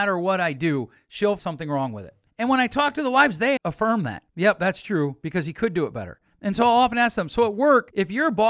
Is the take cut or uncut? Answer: cut